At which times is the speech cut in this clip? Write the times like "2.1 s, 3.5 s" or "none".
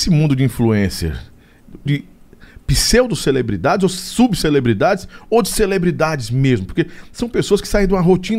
1.9 s

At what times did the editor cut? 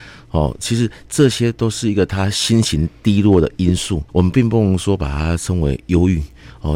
4.1 s

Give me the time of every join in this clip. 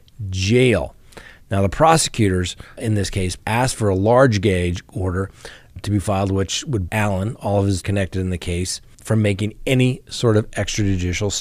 2.8 s, 3.4 s, 5.8 s, 6.9 s, 7.8 s, 8.9 s

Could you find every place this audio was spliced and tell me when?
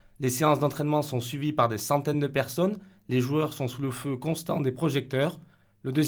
none

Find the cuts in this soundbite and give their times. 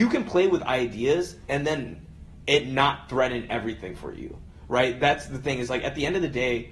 none

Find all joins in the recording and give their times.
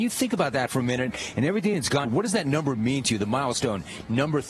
2.0 s

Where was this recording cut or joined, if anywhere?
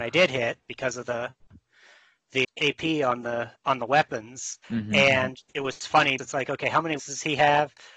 2.4 s, 3.6 s, 4.6 s, 5.5 s, 6.2 s, 7.0 s

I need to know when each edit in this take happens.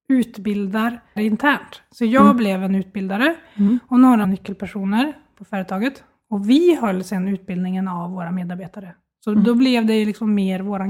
1.2 s, 4.2 s

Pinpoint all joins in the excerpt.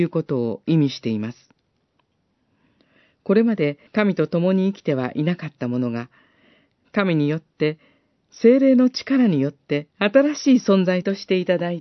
3.9 s, 9.9 s

